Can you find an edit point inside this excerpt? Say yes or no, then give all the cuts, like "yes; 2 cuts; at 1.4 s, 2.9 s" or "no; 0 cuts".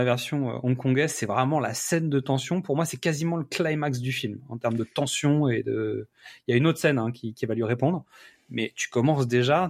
no; 0 cuts